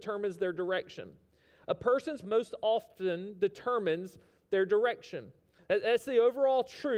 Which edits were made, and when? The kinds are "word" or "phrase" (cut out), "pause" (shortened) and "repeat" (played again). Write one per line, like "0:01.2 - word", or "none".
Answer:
0:02.2 - word